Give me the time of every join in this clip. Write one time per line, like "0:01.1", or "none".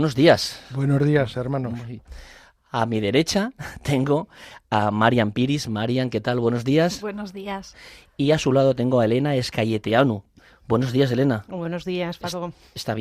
none